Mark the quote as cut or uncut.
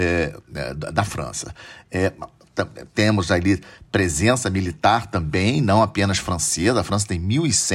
uncut